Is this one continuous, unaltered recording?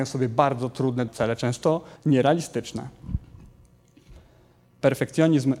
no; 2 cuts; at 1.1 s, 2.0 s

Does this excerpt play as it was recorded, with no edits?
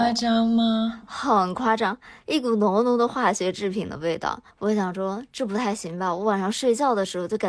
no; 1 cut; at 4.5 s

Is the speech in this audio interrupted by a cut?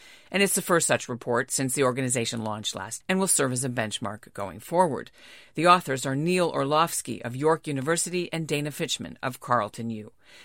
yes; 1 cut; at 3.0 s

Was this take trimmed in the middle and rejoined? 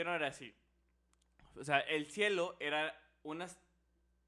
no; 0 cuts

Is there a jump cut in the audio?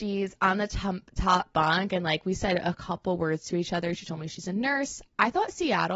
no; 0 cuts

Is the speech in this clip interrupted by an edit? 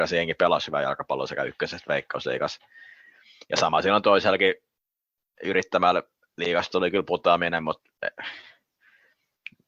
no; 0 cuts

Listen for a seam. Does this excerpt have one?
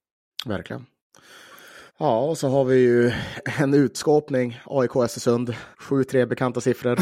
yes; 2 cuts; at 1.9 s, 5.7 s

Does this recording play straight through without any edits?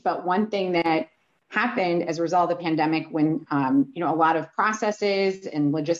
yes; 0 cuts

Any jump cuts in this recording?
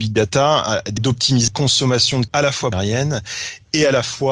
yes; 4 cuts; at 1.0 s, 1.5 s, 2.3 s, 2.7 s

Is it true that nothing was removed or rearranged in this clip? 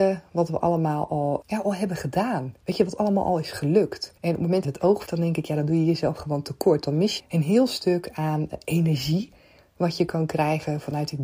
no; 6 cuts; at 1.4 s, 2.6 s, 4.2 s, 4.6 s, 5.1 s, 7.2 s

